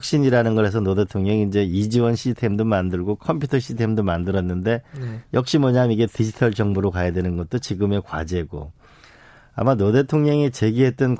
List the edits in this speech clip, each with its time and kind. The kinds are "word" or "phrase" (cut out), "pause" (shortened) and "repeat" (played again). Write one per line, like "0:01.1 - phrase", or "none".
none